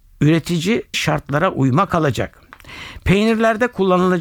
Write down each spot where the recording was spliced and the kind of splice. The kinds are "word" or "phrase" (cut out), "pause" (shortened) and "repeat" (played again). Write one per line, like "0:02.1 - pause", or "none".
0:00.9 - word
0:01.9 - word